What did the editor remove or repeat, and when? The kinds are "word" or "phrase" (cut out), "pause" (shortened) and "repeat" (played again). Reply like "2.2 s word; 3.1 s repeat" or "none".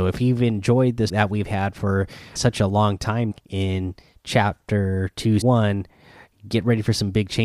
1.1 s word; 2.4 s word; 3.3 s word; 5.4 s word